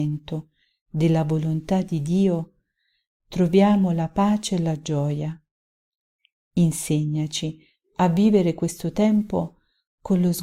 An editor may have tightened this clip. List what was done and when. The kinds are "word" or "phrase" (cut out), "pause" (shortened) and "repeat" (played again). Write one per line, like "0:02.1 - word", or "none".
none